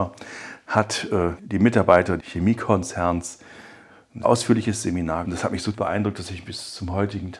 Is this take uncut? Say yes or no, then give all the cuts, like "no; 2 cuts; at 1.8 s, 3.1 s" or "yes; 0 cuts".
no; 5 cuts; at 1.4 s, 2.2 s, 4.2 s, 5.2 s, 5.7 s